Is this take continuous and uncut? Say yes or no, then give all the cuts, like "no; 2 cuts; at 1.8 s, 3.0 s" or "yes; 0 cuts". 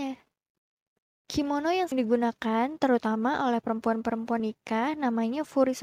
no; 2 cuts; at 1.9 s, 4.4 s